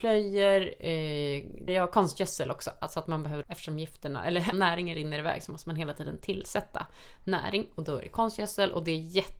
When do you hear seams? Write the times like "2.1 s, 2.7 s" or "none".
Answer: 1.7 s, 3.4 s, 4.5 s